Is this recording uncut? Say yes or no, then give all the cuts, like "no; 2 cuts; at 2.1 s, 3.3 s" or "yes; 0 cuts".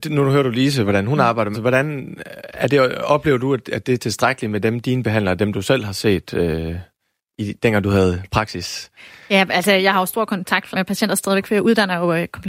no; 2 cuts; at 1.5 s, 10.7 s